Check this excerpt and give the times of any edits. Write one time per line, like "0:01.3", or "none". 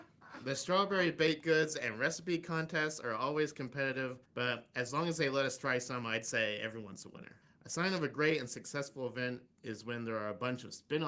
0:04.2
0:07.4